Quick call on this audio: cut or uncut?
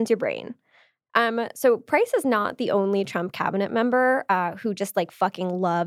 uncut